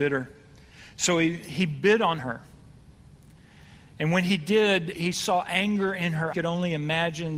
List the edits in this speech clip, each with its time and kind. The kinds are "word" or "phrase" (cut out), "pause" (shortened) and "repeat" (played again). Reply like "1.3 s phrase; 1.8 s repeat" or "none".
2.2 s phrase; 4.9 s word; 6.3 s phrase